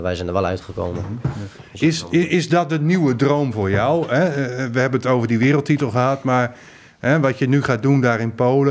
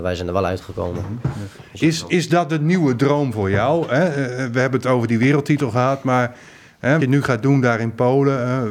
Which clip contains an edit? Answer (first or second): second